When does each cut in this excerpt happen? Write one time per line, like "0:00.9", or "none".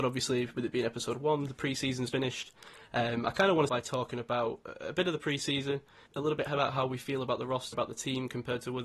0:02.1
0:03.7
0:06.1
0:07.7